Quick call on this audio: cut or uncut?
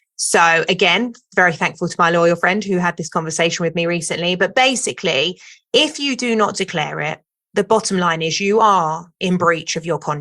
uncut